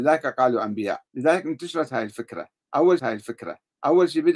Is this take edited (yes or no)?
yes